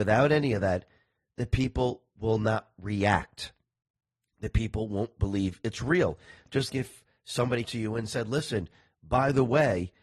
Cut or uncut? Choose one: cut